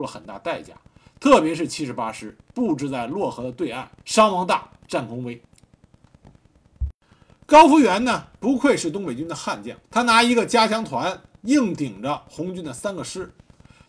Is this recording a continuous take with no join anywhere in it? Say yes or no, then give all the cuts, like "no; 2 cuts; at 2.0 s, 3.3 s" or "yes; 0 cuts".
no; 3 cuts; at 4.0 s, 5.4 s, 9.8 s